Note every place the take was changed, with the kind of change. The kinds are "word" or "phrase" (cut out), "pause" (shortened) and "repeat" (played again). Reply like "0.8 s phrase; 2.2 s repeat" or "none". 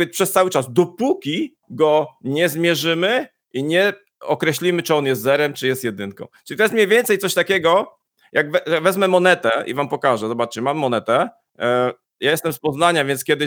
1.6 s pause; 11.5 s pause